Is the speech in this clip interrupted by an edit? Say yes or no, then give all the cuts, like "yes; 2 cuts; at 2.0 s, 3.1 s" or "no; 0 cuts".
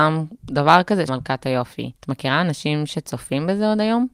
yes; 2 cuts; at 1.1 s, 2.0 s